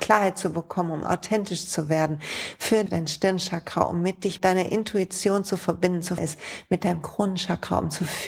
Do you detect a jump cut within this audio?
yes; 3 cuts; at 2.9 s, 4.4 s, 6.2 s

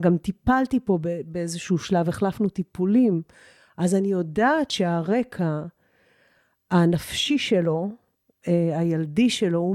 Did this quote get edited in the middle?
no; 0 cuts

